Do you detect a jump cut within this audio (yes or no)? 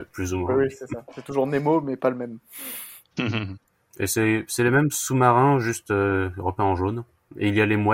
no